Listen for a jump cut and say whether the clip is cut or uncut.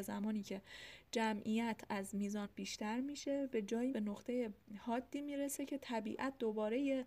cut